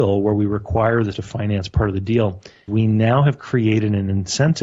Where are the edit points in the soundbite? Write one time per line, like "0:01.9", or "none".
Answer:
0:01.1
0:02.7

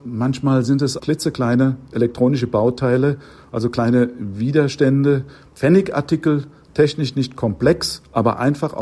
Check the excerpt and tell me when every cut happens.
0:01.0

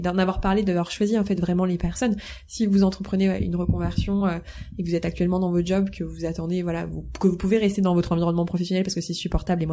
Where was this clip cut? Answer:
none

